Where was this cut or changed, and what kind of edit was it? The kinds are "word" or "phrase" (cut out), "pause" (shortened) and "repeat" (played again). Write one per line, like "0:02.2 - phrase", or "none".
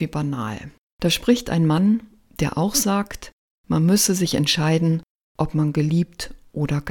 none

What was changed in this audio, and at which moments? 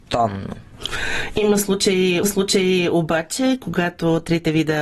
0:02.2 - repeat

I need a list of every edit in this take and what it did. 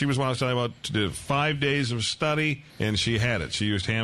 0:02.7 - pause

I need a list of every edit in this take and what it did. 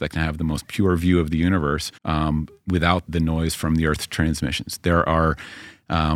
0:02.0 - pause
0:03.1 - word

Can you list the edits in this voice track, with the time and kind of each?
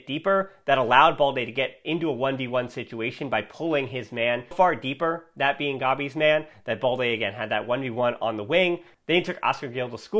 0:04.5 - word

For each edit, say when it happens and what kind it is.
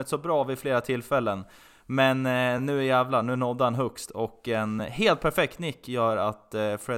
none

